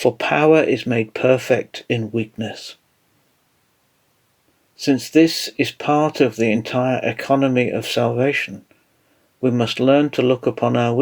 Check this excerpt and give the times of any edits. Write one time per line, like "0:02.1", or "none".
none